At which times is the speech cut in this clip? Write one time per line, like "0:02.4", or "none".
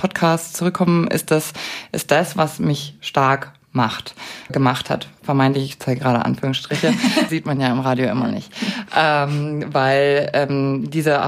0:04.5
0:07.3